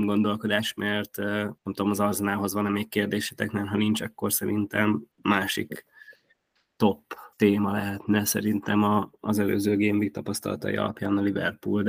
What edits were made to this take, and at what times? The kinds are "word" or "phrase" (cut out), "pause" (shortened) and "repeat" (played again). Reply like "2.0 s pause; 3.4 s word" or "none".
1.6 s pause; 5.1 s pause; 7.3 s pause